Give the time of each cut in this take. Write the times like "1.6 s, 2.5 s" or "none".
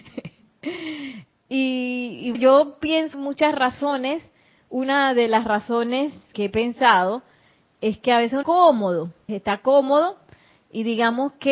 1.3 s, 2.3 s, 3.1 s, 6.3 s, 8.4 s, 9.3 s

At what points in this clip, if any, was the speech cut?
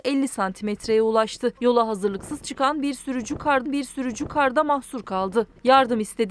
1.6 s, 3.7 s

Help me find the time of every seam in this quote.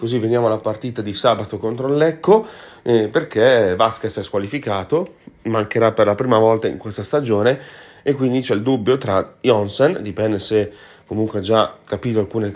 none

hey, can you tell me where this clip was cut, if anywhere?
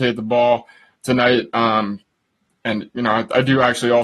none

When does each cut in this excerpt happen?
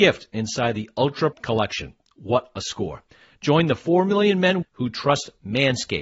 1.3 s, 4.6 s

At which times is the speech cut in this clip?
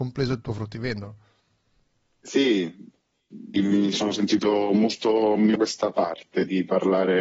3.5 s, 3.9 s, 5.6 s

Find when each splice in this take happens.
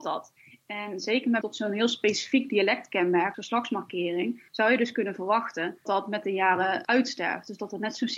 1.4 s, 3.3 s, 4.5 s, 5.9 s

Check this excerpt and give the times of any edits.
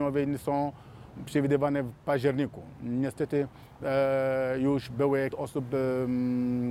5.3 s

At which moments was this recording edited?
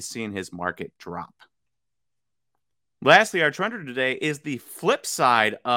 none

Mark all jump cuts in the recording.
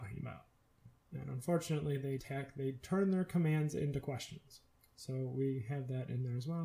2.2 s, 4.7 s

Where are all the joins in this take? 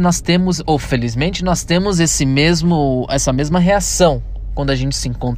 none

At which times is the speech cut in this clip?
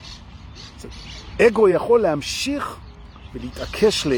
none

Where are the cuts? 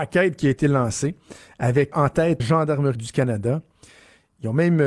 1.9 s, 2.4 s, 2.9 s

